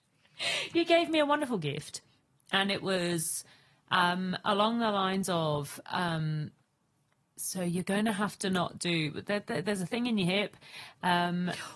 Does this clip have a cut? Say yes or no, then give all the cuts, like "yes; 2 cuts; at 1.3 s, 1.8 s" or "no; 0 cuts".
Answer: no; 0 cuts